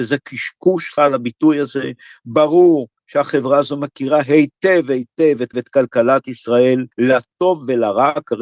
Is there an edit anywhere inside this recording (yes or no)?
yes